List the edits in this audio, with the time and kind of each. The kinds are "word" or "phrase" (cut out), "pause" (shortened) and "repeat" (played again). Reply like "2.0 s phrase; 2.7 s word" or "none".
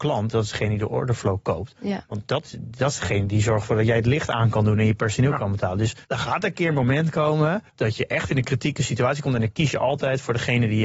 6.0 s pause; 7.7 s pause

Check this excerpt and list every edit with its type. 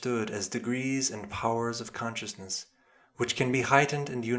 none

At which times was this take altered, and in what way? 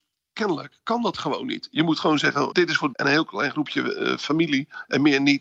2.5 s word; 2.9 s word

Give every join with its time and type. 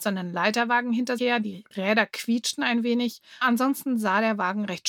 1.2 s word; 3.4 s word

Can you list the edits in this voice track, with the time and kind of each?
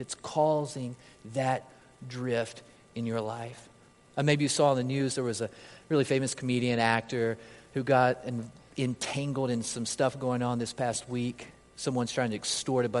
none

